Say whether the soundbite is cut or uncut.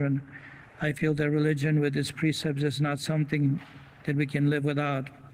uncut